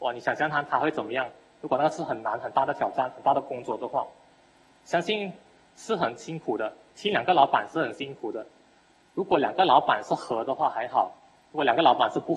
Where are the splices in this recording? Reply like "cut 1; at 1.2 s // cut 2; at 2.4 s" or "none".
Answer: none